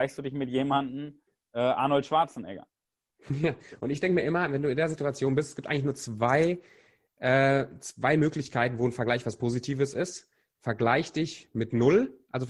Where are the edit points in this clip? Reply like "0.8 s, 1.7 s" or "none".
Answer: none